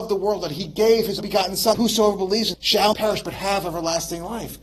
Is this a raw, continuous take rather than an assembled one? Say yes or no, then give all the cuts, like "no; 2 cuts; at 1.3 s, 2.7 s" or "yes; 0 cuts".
no; 4 cuts; at 1.2 s, 1.7 s, 2.5 s, 2.9 s